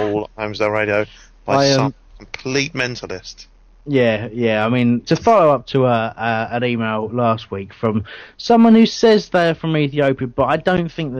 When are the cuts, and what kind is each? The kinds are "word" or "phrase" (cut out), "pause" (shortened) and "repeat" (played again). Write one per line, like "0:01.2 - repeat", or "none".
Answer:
0:05.1 - word